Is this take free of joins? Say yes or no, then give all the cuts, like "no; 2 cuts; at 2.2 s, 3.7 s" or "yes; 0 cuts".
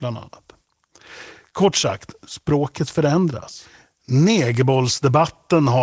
yes; 0 cuts